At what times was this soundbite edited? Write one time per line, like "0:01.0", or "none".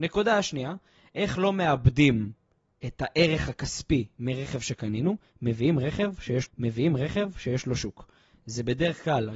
0:02.6
0:06.5